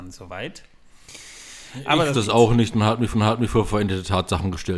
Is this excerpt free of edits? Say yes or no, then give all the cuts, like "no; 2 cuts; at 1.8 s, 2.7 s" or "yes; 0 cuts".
no; 2 cuts; at 2.1 s, 3.1 s